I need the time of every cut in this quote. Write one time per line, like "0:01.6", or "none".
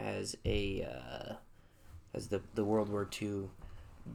0:02.1